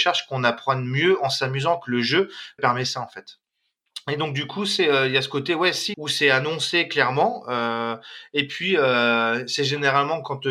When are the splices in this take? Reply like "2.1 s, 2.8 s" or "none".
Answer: 2.6 s, 5.9 s